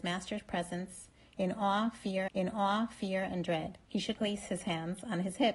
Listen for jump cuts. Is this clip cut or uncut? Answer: cut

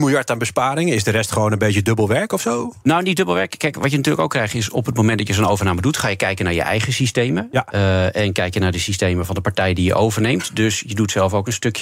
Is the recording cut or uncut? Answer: uncut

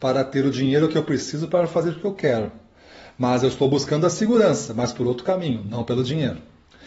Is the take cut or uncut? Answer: uncut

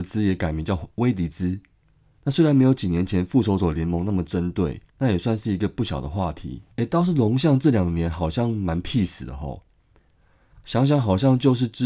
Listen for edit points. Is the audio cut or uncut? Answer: cut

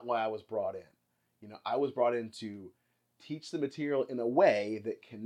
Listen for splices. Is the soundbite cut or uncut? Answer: uncut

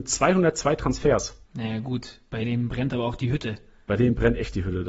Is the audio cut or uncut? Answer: cut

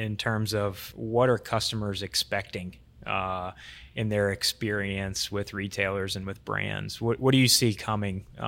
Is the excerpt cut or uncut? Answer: uncut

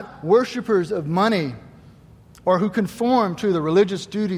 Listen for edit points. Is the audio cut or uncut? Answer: uncut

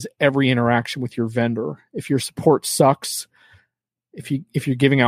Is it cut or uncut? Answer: uncut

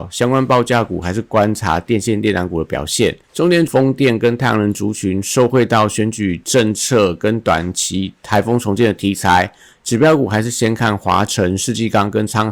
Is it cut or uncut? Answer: cut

